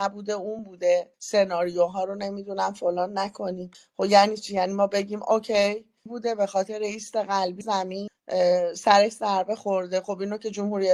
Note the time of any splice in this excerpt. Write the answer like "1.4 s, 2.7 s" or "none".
1.1 s, 6.1 s, 7.6 s